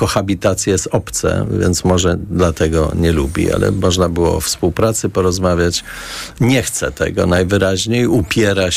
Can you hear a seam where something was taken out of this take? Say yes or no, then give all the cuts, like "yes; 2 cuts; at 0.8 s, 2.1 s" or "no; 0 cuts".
no; 0 cuts